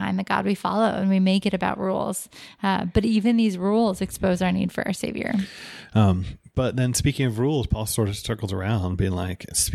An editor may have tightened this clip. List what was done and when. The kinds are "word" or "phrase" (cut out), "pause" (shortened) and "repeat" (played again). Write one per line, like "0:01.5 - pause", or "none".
none